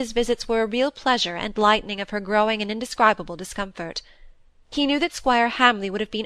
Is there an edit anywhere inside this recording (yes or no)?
no